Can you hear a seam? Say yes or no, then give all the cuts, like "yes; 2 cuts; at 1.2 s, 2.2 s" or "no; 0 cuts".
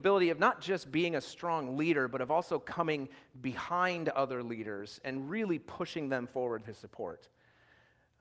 yes; 1 cut; at 6.6 s